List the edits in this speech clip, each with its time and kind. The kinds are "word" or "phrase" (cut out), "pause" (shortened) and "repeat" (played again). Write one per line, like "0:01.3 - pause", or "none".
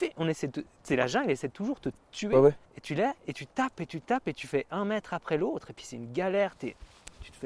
0:02.6 - pause